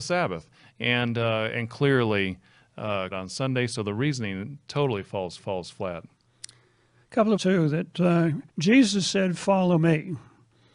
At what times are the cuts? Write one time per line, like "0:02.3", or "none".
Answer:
0:03.1
0:05.4
0:07.4
0:08.5